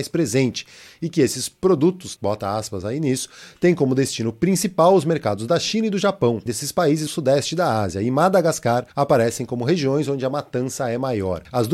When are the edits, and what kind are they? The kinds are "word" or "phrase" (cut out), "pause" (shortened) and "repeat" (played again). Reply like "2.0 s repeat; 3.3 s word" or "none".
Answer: 2.2 s word; 6.5 s word; 7.1 s word; 8.9 s pause